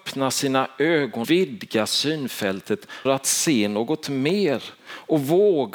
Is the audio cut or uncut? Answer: cut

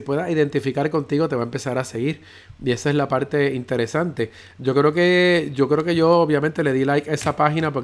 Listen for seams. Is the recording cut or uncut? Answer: uncut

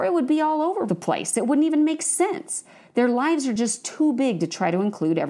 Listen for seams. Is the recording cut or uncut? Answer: uncut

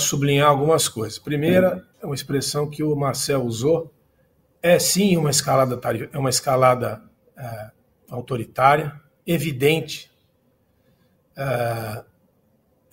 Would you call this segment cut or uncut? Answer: cut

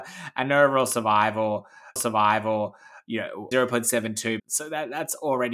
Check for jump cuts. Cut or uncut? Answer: cut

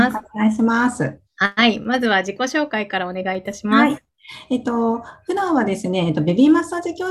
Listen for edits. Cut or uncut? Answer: cut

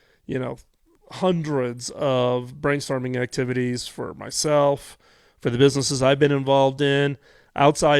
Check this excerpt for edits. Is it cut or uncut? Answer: uncut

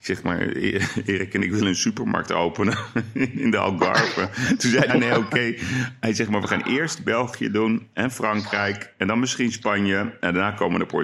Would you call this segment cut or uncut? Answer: cut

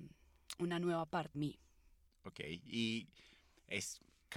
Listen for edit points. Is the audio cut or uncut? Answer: cut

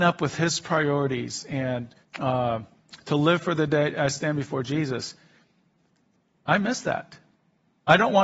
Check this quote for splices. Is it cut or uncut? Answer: cut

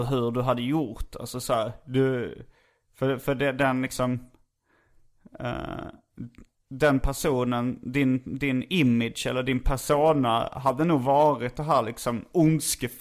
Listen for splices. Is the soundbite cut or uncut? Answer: uncut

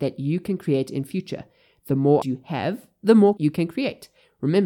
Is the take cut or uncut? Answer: cut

